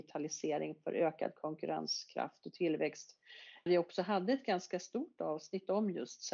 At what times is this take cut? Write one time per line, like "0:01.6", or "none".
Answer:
0:03.7